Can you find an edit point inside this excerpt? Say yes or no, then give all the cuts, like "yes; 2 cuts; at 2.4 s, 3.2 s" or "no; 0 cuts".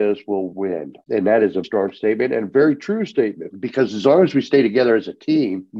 yes; 1 cut; at 1.6 s